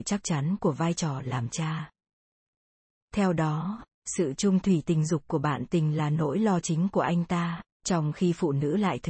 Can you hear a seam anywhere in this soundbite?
no; 0 cuts

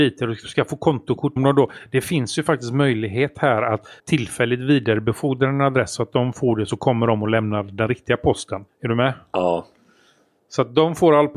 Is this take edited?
yes; 3 cuts; at 1.4 s, 4.0 s, 8.7 s

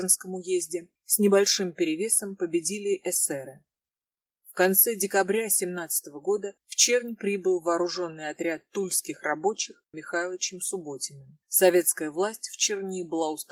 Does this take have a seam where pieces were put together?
yes; 4 cuts; at 1.0 s, 6.6 s, 9.9 s, 11.4 s

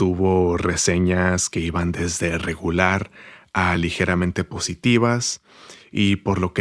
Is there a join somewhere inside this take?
no; 0 cuts

